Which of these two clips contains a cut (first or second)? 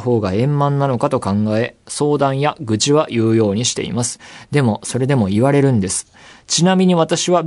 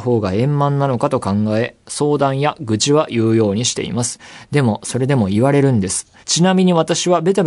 second